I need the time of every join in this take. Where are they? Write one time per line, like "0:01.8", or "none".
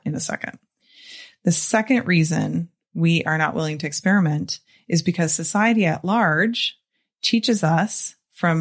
none